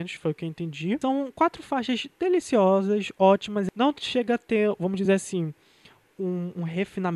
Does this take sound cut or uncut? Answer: uncut